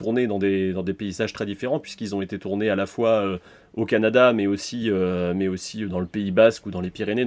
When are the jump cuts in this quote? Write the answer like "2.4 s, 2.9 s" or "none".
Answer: none